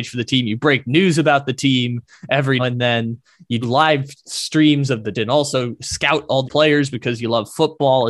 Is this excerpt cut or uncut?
cut